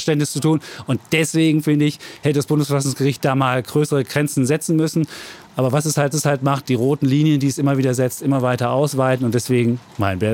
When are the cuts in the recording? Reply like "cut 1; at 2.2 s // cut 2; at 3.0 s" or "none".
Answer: cut 1; at 6.1 s